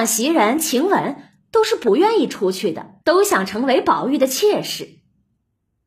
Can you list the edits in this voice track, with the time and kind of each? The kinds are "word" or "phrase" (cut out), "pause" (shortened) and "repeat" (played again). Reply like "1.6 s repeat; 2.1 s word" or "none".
3.0 s pause

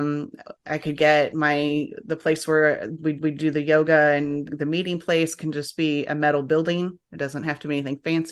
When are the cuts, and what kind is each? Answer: 3.2 s repeat; 4.5 s word

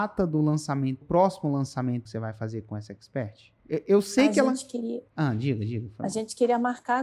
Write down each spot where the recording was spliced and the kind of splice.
1.0 s word; 2.1 s word; 3.6 s pause; 5.1 s pause

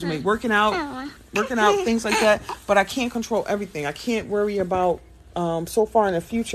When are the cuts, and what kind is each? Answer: none

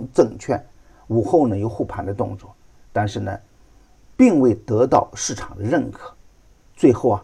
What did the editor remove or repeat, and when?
none

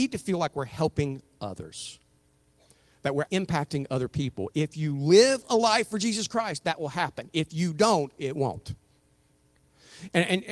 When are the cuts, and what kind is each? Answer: 3.3 s word

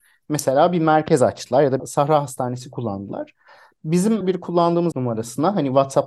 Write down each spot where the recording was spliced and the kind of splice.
1.8 s phrase; 4.2 s word; 4.9 s word

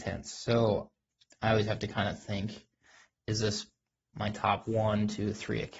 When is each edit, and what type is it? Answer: none

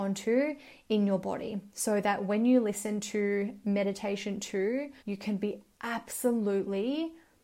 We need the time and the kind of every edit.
5.0 s pause

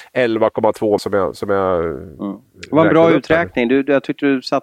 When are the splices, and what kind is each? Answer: 1.0 s word

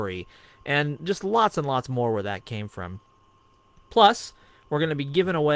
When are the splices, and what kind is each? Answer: none

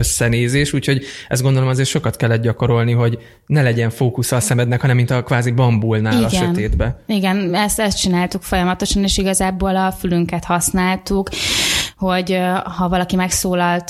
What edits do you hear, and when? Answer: none

